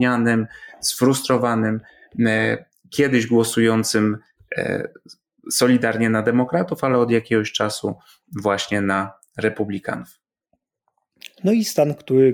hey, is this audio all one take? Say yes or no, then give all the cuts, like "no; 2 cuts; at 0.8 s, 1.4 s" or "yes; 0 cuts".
yes; 0 cuts